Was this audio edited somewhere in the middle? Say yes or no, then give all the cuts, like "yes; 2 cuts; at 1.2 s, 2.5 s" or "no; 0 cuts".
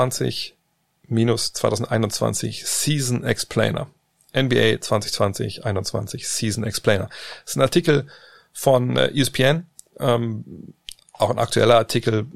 no; 0 cuts